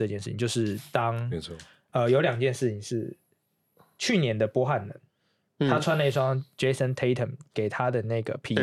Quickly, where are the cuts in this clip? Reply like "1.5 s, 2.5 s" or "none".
none